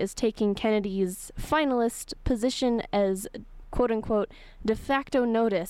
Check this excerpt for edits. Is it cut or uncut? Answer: cut